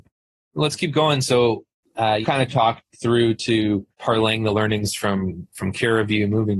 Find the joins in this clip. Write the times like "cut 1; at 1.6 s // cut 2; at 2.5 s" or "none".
cut 1; at 2.2 s // cut 2; at 3.9 s